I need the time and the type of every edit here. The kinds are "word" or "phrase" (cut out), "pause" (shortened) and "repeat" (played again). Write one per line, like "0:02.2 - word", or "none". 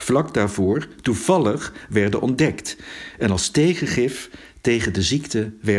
none